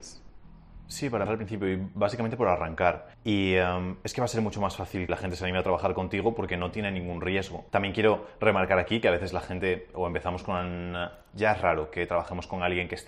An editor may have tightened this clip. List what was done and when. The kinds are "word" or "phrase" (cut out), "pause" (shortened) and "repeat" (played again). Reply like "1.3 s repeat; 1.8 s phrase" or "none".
1.3 s word; 3.1 s pause; 5.1 s word; 7.7 s pause